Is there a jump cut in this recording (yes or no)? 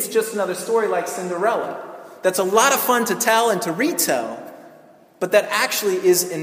no